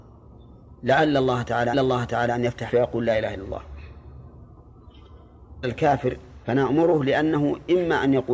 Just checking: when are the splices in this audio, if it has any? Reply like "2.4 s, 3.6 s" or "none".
1.7 s, 2.7 s, 5.6 s, 6.4 s

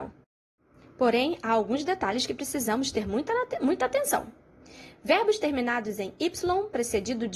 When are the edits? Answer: none

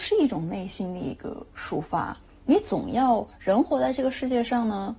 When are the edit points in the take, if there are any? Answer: none

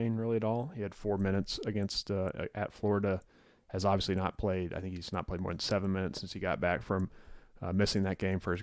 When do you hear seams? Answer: none

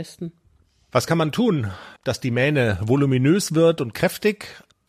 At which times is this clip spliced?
2.0 s

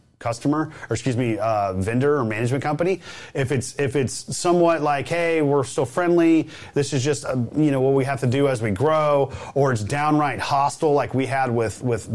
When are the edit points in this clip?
none

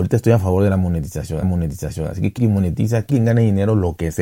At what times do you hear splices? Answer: 1.4 s, 2.4 s, 3.1 s

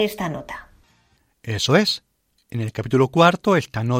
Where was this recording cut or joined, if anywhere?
none

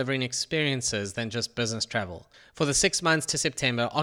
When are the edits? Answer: 2.3 s

